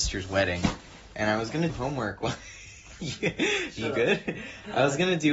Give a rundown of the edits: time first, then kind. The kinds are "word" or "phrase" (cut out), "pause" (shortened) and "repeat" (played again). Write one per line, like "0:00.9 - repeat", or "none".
0:01.7 - word